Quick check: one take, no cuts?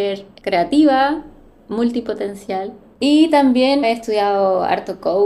no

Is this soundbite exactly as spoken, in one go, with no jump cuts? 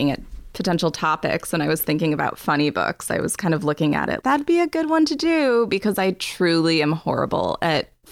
no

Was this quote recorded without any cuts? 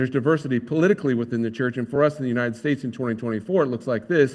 yes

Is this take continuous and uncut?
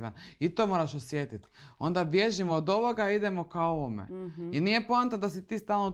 yes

